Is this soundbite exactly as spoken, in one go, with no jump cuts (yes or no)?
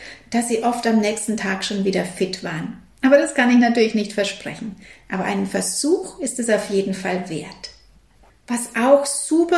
yes